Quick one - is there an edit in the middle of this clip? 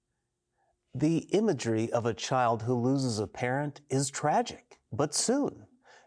yes; 1 cut; at 4.8 s

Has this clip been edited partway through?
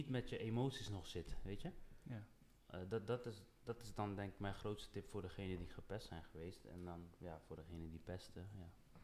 no; 0 cuts

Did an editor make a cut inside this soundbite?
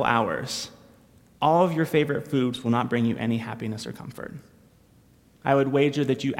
no; 0 cuts

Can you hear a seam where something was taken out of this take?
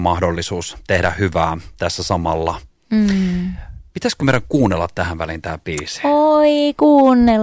no; 0 cuts

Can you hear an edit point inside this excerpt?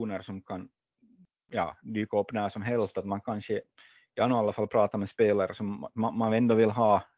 no; 0 cuts

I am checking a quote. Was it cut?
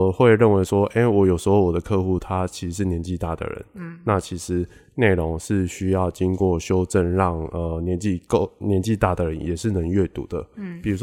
no; 0 cuts

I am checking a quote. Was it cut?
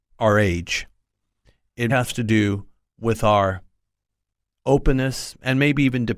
yes; 1 cut; at 1.9 s

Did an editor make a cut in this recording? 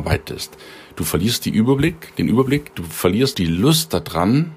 yes; 1 cut; at 3.3 s

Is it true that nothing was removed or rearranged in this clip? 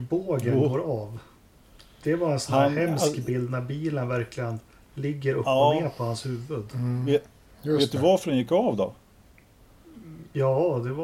no; 1 cut; at 4.8 s

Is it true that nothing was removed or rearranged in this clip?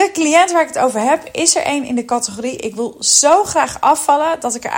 yes; 0 cuts

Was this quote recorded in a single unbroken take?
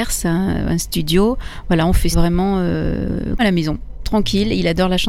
no; 2 cuts; at 2.1 s, 3.4 s

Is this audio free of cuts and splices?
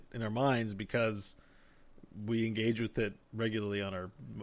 yes; 0 cuts

